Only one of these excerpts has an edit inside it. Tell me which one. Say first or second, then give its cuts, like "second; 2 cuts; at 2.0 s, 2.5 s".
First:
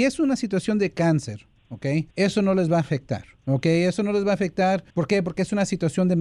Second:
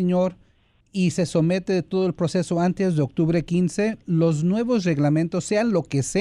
first; 2 cuts; at 2.1 s, 4.9 s